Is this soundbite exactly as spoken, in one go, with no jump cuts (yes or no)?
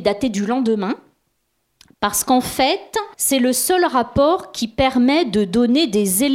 no